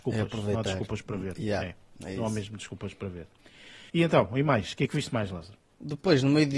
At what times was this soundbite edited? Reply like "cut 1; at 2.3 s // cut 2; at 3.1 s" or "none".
cut 1; at 3.9 s